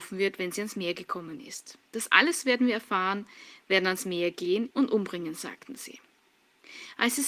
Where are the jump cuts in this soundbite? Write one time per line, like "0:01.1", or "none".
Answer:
0:01.9
0:04.7